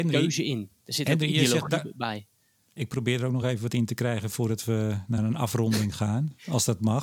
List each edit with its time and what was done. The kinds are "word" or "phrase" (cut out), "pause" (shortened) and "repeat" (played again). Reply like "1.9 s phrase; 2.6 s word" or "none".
none